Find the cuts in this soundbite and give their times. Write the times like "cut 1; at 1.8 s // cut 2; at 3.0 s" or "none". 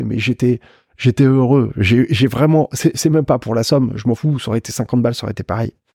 none

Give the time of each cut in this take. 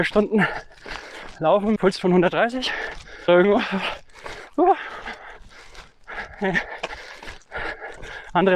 cut 1; at 1.8 s // cut 2; at 3.3 s

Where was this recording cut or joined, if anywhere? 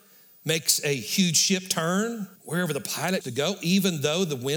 cut 1; at 2.4 s // cut 2; at 3.2 s

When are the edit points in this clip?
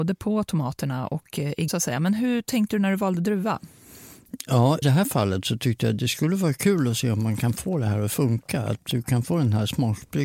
cut 1; at 1.7 s // cut 2; at 4.8 s

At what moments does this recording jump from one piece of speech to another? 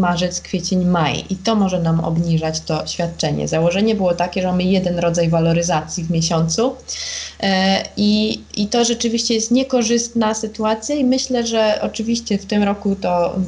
none

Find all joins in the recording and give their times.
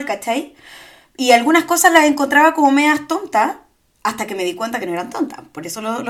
none

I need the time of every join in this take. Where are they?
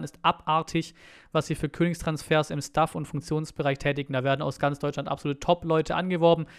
none

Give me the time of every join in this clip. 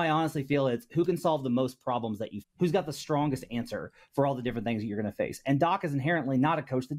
cut 1; at 2.4 s

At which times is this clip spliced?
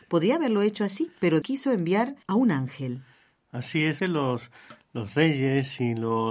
cut 1; at 1.4 s // cut 2; at 2.2 s // cut 3; at 4.0 s

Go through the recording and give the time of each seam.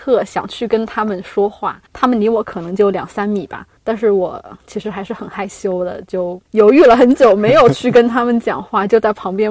cut 1; at 1.9 s // cut 2; at 3.8 s // cut 3; at 6.5 s

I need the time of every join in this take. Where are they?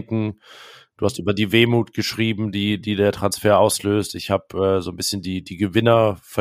none

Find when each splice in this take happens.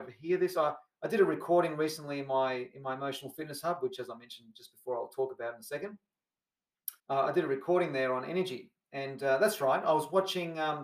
cut 1; at 7.0 s

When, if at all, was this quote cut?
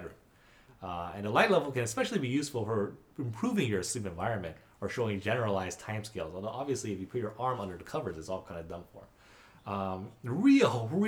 none

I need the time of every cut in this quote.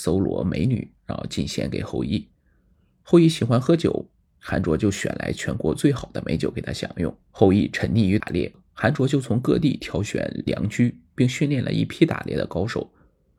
cut 1; at 7.2 s

